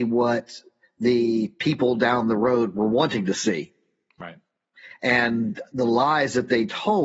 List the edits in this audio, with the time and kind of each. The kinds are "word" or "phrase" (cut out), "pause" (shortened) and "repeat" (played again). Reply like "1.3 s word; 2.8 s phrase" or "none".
none